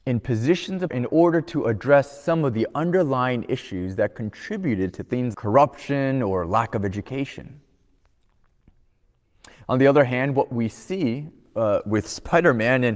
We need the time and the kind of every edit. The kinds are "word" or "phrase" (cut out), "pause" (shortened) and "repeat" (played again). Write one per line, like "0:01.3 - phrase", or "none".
0:00.9 - word
0:05.3 - word

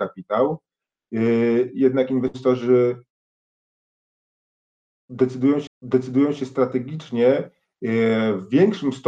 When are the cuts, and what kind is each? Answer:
0:05.7 - repeat

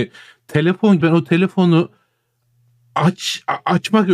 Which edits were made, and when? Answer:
0:01.0 - word

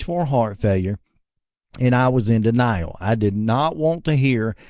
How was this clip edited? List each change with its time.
none

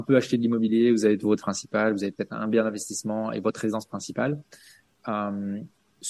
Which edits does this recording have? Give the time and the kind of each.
0:01.4 - word

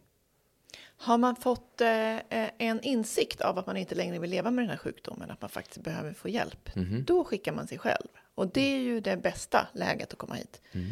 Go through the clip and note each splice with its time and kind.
none

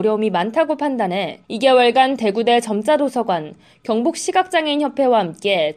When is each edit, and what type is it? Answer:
0:01.4 - pause

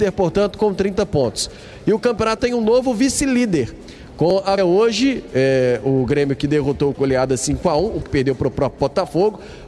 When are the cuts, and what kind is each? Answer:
0:02.4 - word
0:04.6 - word
0:06.9 - word
0:08.0 - word

